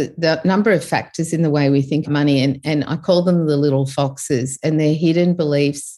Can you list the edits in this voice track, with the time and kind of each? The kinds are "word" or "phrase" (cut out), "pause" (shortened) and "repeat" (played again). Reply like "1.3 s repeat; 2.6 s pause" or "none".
2.0 s word

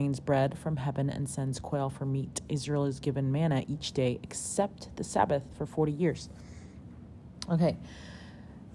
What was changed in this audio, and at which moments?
none

